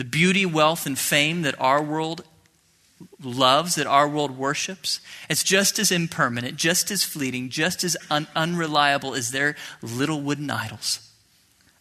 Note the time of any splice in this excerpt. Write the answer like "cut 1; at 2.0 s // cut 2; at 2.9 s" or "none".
none